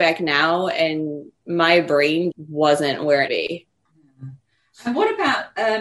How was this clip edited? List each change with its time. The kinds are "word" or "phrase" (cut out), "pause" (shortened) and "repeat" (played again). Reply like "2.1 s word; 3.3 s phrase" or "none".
1.4 s pause; 2.3 s word; 3.3 s phrase